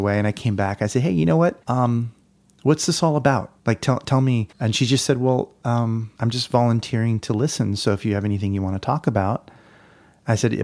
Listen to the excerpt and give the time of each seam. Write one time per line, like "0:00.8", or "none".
0:01.6
0:03.6
0:04.5
0:06.2